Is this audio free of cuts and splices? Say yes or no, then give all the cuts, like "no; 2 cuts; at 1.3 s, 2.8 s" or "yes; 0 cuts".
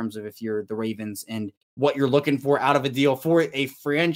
no; 1 cut; at 1.6 s